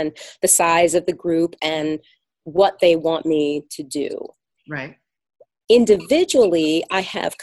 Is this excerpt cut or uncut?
uncut